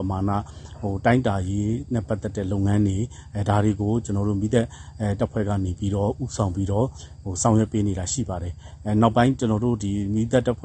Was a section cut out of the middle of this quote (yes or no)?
no